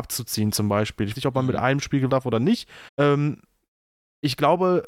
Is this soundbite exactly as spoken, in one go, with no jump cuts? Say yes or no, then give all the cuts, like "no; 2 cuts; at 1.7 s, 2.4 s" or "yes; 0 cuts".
no; 3 cuts; at 1.2 s, 2.1 s, 2.9 s